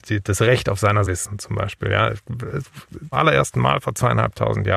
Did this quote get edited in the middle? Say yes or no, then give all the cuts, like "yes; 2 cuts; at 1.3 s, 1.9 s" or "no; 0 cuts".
yes; 2 cuts; at 1.1 s, 3.1 s